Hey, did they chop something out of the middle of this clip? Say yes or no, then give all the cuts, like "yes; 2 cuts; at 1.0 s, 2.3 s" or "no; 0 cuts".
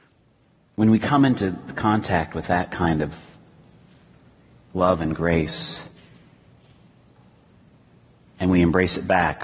no; 0 cuts